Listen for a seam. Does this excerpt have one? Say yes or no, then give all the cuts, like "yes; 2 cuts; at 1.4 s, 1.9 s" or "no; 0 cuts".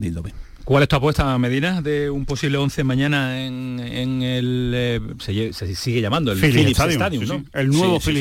no; 0 cuts